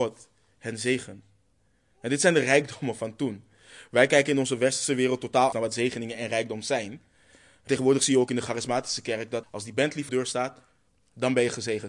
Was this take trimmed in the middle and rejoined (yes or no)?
yes